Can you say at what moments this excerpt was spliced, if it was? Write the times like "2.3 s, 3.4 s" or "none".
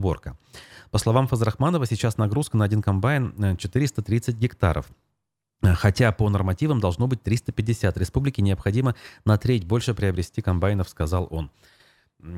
none